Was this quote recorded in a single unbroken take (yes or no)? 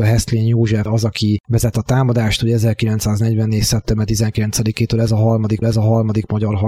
no